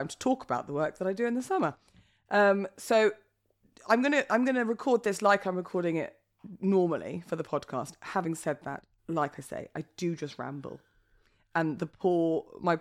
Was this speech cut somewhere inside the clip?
no; 0 cuts

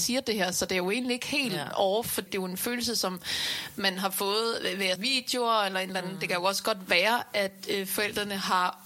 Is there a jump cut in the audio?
yes; 2 cuts; at 2.3 s, 5.0 s

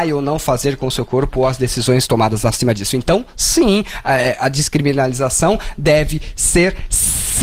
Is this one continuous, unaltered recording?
yes; 0 cuts

